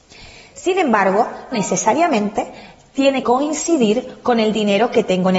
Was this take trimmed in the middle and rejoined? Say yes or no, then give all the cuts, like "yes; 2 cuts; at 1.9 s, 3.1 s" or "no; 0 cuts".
yes; 2 cuts; at 1.5 s, 3.2 s